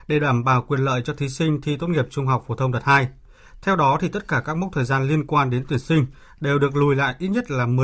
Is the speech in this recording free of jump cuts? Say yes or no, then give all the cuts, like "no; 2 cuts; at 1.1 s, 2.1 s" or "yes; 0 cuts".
yes; 0 cuts